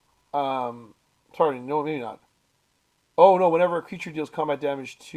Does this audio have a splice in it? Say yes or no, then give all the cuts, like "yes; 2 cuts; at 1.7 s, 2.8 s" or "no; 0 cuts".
no; 0 cuts